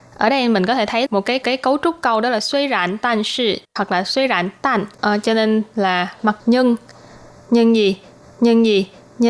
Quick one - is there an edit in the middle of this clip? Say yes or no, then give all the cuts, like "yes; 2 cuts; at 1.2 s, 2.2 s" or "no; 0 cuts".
yes; 5 cuts; at 1.4 s, 3.7 s, 4.9 s, 6.4 s, 8.2 s